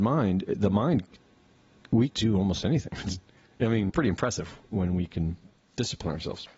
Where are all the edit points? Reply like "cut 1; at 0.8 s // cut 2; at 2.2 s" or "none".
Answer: cut 1; at 2.1 s // cut 2; at 3.9 s // cut 3; at 4.7 s